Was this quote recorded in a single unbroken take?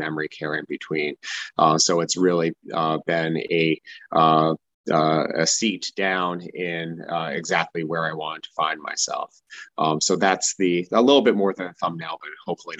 yes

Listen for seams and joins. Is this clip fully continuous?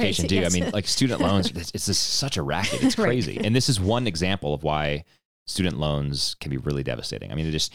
yes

